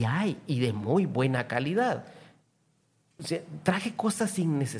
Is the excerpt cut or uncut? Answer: uncut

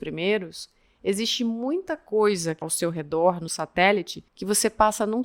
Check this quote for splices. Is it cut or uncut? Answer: cut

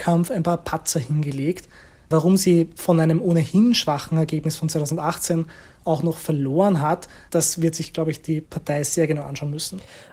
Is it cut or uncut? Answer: cut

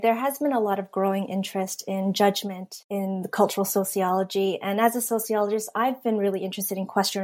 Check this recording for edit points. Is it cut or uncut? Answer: cut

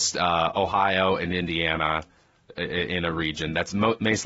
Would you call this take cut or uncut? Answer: uncut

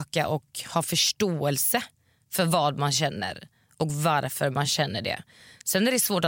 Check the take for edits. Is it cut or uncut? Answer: uncut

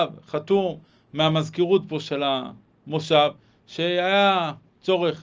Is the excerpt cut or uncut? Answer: uncut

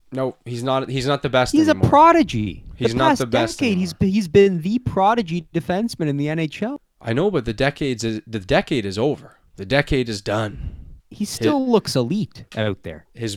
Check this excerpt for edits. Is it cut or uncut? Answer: cut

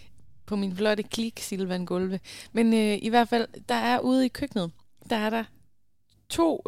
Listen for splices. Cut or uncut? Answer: uncut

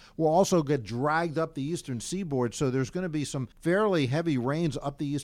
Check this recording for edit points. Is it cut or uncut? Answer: cut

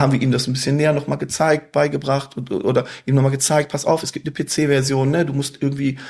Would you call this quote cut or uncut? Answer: uncut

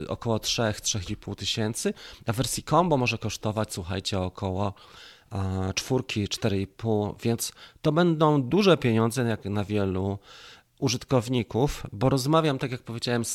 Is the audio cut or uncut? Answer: uncut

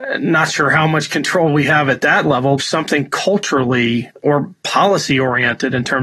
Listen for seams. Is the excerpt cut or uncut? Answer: cut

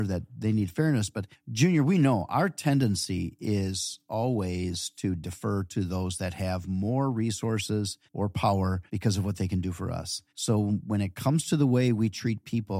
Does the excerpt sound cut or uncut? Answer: cut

